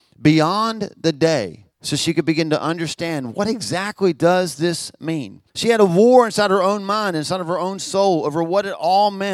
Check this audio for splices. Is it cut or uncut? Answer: cut